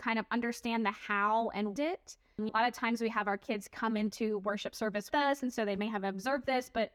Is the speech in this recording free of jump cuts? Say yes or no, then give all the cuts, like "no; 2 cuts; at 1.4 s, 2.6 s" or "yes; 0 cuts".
no; 3 cuts; at 1.8 s, 2.5 s, 5.1 s